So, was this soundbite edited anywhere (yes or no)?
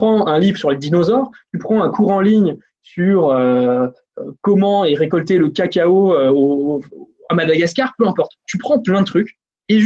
no